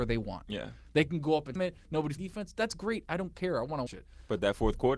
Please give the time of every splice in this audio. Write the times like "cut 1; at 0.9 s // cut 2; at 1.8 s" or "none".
cut 1; at 1.6 s // cut 2; at 2.2 s // cut 3; at 3.9 s